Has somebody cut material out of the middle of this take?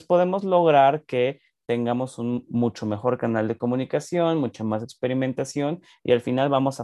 no; 0 cuts

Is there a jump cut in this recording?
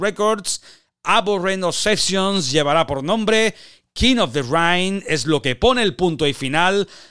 no; 0 cuts

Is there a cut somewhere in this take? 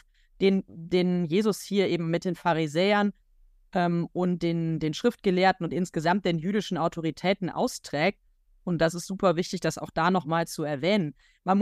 no; 0 cuts

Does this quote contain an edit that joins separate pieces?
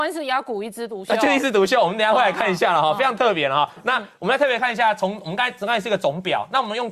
no; 0 cuts

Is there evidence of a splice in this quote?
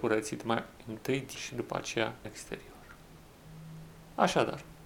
yes; 2 cuts; at 1.4 s, 2.2 s

